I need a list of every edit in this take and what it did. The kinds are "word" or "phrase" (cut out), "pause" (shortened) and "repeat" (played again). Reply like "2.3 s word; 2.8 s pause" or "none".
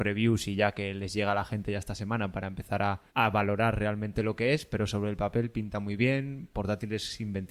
3.1 s pause